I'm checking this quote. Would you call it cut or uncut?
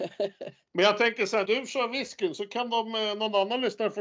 cut